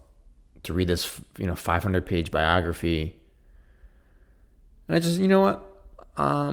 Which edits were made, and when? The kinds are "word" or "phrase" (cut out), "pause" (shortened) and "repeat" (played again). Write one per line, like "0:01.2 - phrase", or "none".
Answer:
none